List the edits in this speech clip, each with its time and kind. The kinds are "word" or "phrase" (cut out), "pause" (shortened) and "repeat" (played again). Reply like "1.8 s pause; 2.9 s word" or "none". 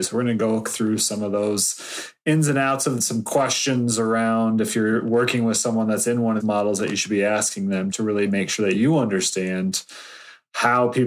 3.0 s phrase; 6.4 s word; 7.9 s word

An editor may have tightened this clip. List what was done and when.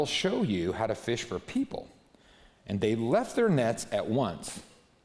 none

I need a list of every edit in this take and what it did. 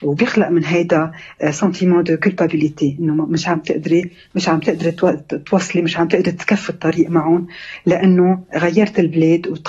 none

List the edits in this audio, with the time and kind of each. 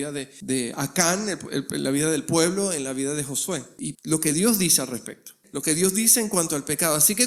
3.9 s word

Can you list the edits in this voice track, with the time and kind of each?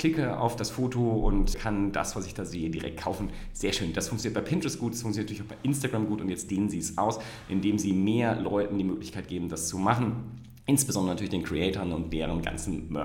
1.5 s word

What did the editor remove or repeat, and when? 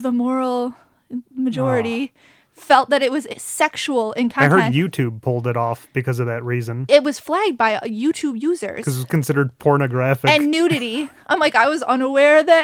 none

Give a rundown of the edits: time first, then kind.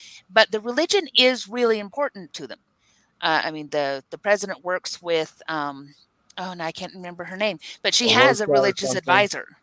none

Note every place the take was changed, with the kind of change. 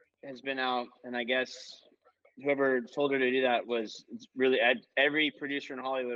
none

